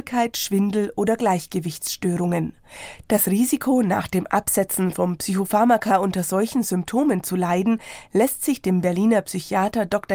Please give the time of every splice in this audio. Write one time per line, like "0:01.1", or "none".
none